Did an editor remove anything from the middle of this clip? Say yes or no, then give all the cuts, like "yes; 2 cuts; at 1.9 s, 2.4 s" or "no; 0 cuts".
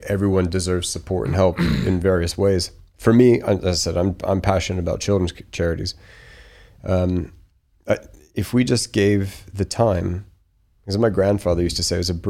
no; 0 cuts